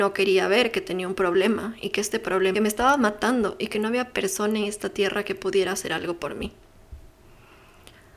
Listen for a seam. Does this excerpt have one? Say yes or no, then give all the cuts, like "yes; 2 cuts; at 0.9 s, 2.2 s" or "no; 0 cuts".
yes; 1 cut; at 2.5 s